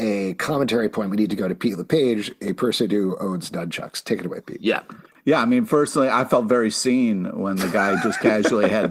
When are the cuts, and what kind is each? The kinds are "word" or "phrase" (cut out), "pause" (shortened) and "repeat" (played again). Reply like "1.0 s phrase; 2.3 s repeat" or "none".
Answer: none